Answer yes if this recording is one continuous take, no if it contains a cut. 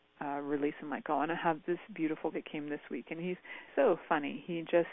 no